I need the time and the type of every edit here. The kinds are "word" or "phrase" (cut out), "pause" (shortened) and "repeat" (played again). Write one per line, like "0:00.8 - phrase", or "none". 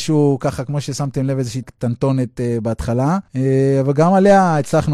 0:01.6 - word
0:03.3 - pause